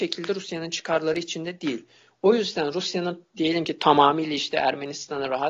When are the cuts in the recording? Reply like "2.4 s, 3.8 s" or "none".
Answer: none